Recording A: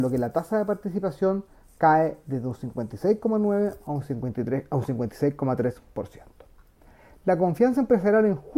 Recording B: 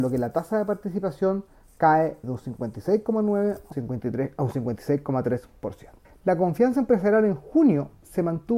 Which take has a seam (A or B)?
B